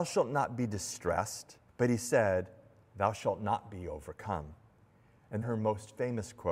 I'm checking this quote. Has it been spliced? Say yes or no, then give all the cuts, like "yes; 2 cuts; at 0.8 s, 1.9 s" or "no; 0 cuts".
yes; 2 cuts; at 1.7 s, 5.4 s